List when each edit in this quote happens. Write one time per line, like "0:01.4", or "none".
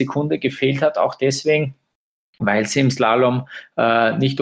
none

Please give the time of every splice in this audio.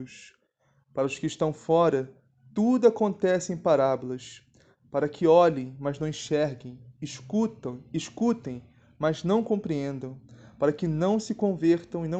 none

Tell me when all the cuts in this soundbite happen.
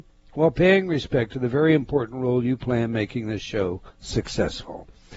0:03.9

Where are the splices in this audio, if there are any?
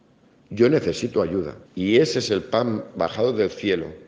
0:01.7

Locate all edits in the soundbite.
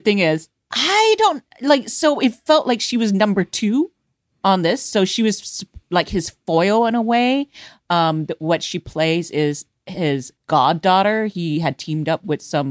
0:10.4

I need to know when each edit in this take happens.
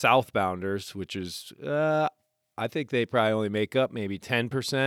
none

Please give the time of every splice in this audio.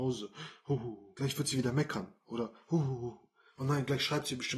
none

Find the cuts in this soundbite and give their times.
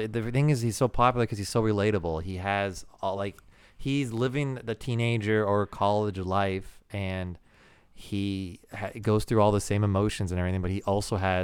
none

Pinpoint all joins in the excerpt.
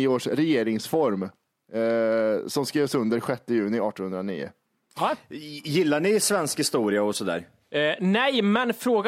none

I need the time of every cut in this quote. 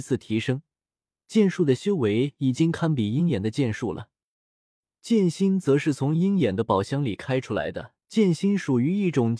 0:08.0

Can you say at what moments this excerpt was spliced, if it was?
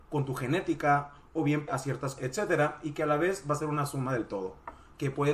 0:01.7
0:02.2

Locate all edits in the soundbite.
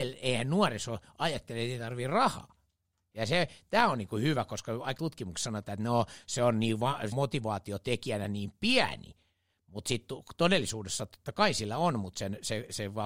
0:05.0
0:07.1

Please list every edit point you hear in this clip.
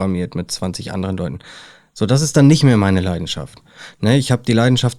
none

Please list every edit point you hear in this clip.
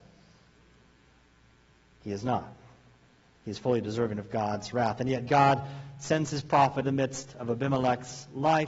0:06.8

